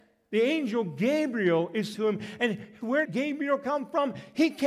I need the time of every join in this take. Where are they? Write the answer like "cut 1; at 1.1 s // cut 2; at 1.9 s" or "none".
cut 1; at 1.9 s // cut 2; at 3.0 s